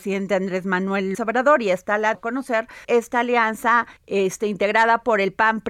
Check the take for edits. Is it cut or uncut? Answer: cut